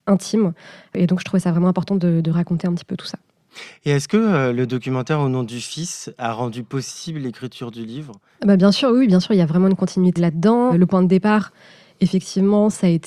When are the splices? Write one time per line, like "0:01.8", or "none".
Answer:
none